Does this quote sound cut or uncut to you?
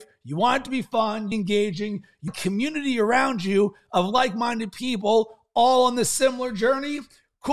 cut